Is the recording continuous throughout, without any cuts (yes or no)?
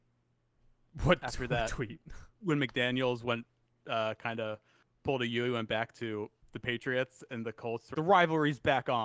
no